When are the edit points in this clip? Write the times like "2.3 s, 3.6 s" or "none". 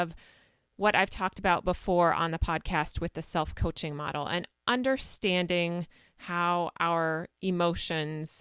none